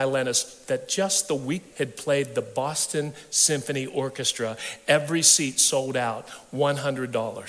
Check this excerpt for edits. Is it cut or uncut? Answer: cut